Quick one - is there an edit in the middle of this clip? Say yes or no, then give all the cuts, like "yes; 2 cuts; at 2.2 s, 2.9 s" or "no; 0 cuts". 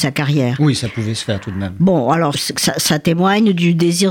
yes; 1 cut; at 2.3 s